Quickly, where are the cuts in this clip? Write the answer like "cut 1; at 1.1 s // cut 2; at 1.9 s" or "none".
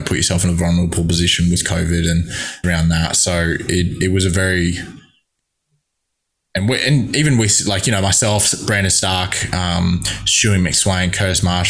cut 1; at 2.6 s